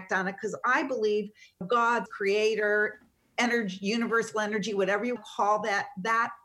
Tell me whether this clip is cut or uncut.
cut